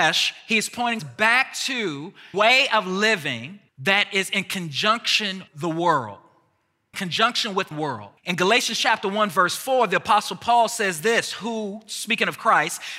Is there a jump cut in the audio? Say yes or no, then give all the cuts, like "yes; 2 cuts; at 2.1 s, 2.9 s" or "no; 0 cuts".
yes; 7 cuts; at 1.0 s, 2.3 s, 3.7 s, 5.5 s, 6.9 s, 7.7 s, 8.2 s